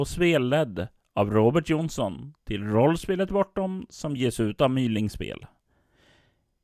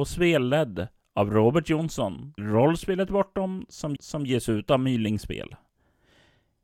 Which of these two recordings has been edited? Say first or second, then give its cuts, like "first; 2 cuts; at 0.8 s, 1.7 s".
second; 2 cuts; at 2.4 s, 4.0 s